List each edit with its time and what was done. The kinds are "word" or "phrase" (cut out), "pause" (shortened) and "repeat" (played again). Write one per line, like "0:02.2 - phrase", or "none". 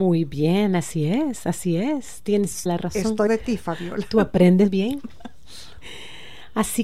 0:02.7 - word
0:03.3 - word
0:04.7 - word